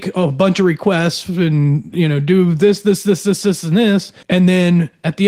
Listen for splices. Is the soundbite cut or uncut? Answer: cut